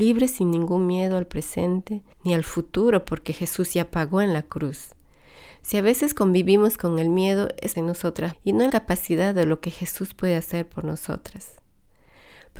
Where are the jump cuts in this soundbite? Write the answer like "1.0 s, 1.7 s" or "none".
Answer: 2.1 s, 7.7 s, 8.3 s, 8.7 s